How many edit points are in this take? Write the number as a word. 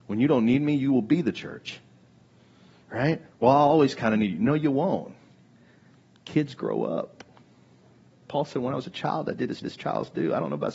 two